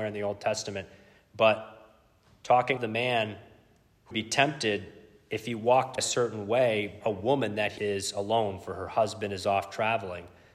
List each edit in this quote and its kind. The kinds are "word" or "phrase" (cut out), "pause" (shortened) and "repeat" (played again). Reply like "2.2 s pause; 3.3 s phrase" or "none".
2.8 s word; 4.1 s word; 6.0 s word; 7.0 s word; 7.8 s word